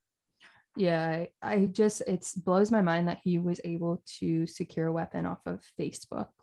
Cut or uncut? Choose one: uncut